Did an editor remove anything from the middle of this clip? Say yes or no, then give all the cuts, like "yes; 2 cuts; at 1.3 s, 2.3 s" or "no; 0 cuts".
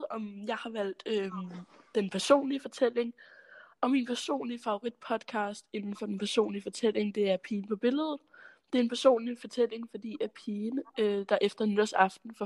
no; 0 cuts